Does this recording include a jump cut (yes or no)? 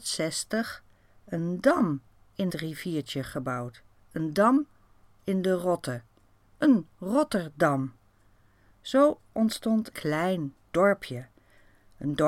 yes